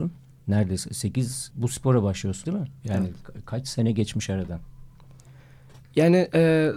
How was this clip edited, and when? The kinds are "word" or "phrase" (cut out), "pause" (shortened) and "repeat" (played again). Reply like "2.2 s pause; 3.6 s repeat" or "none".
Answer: 1.5 s word; 2.4 s word